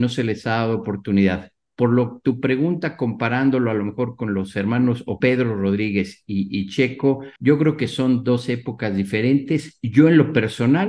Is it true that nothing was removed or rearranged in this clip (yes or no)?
no